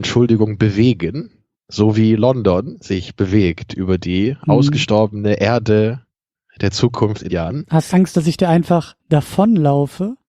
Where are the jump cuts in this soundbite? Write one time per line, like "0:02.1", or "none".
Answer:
0:01.5
0:07.3
0:07.9
0:09.0